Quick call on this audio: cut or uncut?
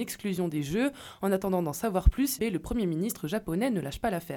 cut